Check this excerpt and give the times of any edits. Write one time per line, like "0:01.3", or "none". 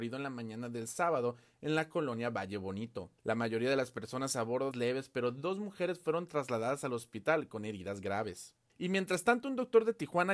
0:03.2
0:04.7